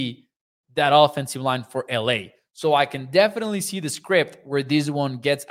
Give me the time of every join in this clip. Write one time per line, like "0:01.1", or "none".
none